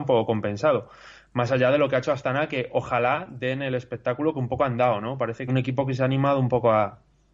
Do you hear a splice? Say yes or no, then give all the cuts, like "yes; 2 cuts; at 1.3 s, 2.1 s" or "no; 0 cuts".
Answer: yes; 1 cut; at 5.5 s